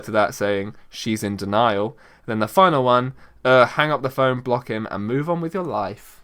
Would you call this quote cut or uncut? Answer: uncut